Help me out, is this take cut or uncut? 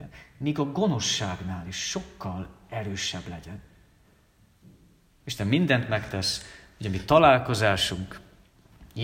uncut